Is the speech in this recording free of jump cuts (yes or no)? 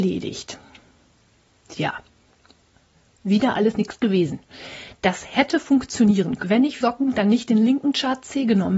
no